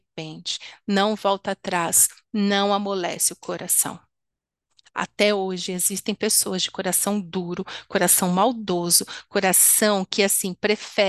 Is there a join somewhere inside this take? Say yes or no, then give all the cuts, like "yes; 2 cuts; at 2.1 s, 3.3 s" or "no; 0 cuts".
no; 0 cuts